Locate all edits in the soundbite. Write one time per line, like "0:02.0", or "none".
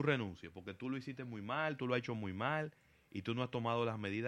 none